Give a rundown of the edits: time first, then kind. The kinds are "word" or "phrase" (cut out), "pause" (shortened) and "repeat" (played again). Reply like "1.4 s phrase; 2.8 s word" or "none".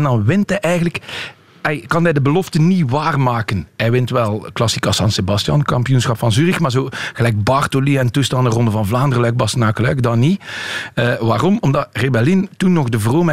none

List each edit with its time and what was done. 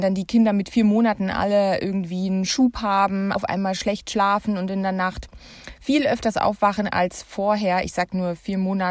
3.3 s word

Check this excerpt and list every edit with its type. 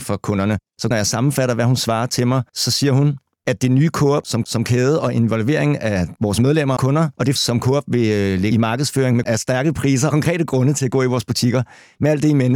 0.9 s word; 2.5 s pause; 4.4 s repeat; 6.8 s word; 7.4 s word; 8.5 s phrase; 9.2 s word; 10.1 s word

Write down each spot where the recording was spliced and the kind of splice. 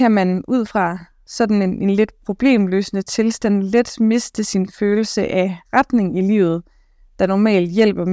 none

